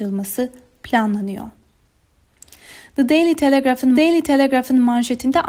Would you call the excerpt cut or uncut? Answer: cut